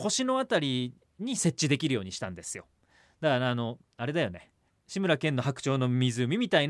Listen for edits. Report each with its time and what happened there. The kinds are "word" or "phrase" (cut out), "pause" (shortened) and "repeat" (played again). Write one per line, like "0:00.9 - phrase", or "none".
0:04.7 - pause